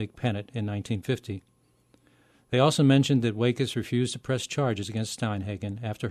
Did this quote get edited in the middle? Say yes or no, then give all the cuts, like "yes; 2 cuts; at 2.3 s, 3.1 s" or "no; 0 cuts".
no; 0 cuts